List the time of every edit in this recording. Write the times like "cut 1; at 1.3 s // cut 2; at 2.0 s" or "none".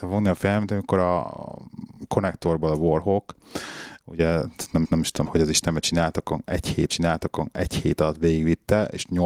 cut 1; at 4.8 s // cut 2; at 5.2 s // cut 3; at 6.9 s